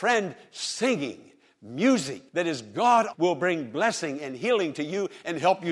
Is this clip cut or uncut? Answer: cut